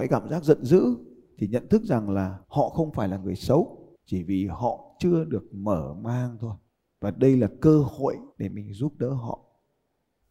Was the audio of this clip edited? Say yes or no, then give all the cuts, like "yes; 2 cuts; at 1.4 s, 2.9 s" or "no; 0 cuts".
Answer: yes; 4 cuts; at 2.4 s, 4.0 s, 6.7 s, 8.3 s